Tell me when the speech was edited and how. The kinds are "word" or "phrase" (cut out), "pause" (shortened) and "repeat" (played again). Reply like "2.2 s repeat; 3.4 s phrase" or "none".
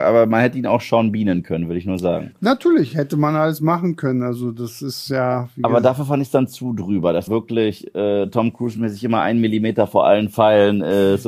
7.3 s word